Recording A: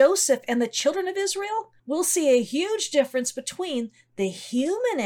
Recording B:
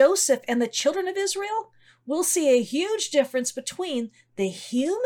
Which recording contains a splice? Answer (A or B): A